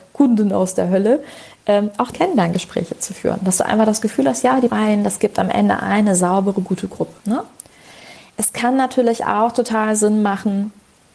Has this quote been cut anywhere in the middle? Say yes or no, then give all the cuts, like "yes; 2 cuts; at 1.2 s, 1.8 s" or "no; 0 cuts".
yes; 3 cuts; at 2.1 s, 4.7 s, 7.2 s